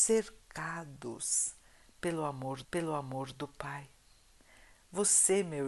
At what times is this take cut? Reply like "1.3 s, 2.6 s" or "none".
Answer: 2.6 s